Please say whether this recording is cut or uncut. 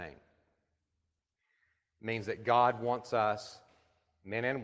uncut